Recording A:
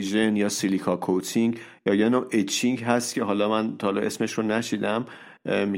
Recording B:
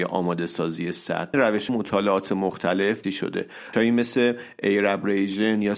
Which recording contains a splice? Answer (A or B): B